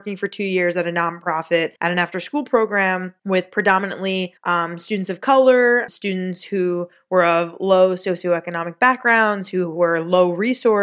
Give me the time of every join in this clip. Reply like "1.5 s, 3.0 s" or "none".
1.8 s, 3.2 s, 4.4 s, 5.9 s

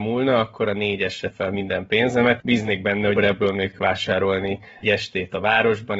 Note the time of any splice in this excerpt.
1.3 s, 2.4 s, 3.2 s, 3.7 s, 4.8 s

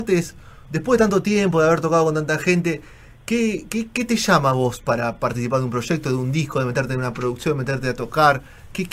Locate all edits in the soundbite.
none

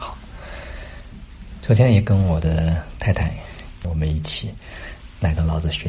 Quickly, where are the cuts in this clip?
3.8 s

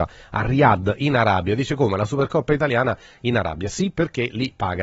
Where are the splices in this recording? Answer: none

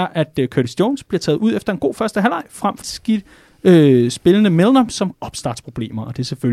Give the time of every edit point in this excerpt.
2.8 s, 5.1 s

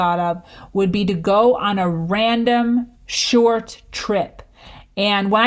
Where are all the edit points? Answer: 2.9 s

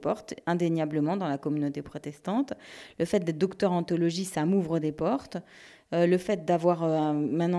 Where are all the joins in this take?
none

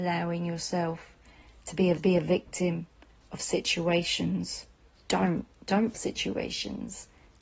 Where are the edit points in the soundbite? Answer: 2.0 s, 4.9 s, 5.9 s

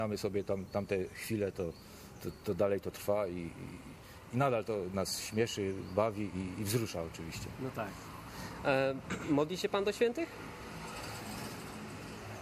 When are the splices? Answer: none

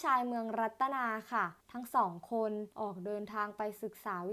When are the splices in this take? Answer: 1.6 s, 2.7 s

